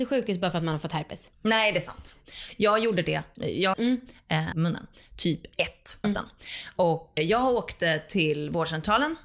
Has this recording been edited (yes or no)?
yes